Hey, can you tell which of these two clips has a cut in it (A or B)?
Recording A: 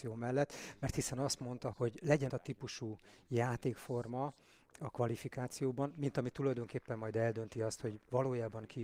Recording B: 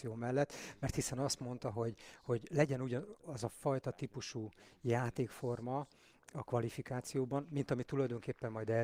A